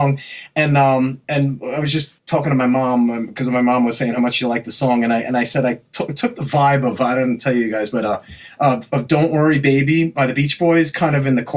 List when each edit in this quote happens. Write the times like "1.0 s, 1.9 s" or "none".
2.2 s